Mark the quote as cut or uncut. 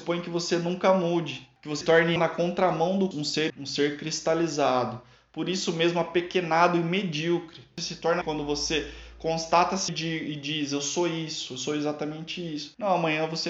cut